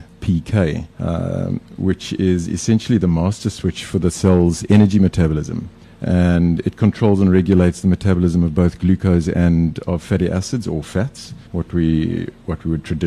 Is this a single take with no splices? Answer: no; 3 cuts; at 0.9 s, 5.8 s, 11.5 s

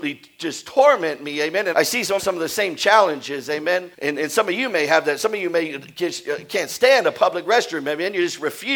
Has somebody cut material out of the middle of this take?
yes; 3 cuts; at 1.7 s, 2.2 s, 3.9 s

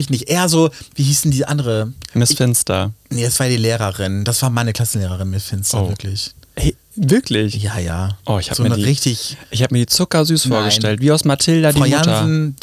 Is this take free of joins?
no; 2 cuts; at 2.1 s, 3.0 s

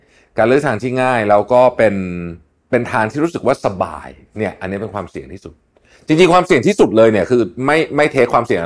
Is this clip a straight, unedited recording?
yes; 0 cuts

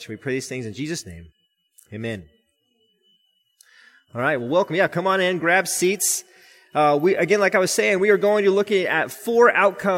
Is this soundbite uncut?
yes; 0 cuts

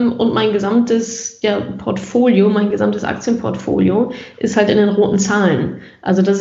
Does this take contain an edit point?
no; 0 cuts

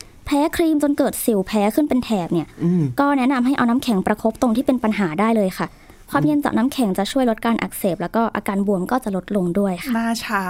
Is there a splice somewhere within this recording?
no; 0 cuts

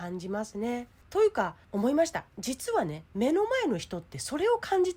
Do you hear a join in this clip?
no; 0 cuts

